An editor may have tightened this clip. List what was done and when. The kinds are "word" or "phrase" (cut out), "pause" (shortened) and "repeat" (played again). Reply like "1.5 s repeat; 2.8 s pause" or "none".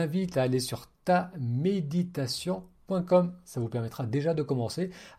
none